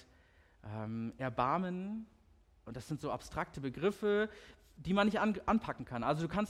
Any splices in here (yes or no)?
no